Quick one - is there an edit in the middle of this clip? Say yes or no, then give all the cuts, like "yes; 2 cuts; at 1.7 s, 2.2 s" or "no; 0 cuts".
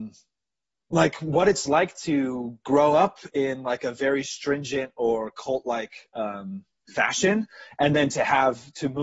no; 0 cuts